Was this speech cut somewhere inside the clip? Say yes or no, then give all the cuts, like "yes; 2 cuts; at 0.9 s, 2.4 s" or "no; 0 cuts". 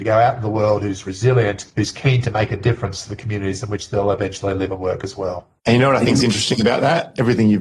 yes; 2 cuts; at 1.7 s, 5.6 s